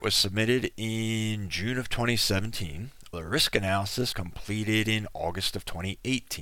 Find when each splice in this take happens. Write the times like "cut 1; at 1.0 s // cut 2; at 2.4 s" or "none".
cut 1; at 3.1 s // cut 2; at 4.1 s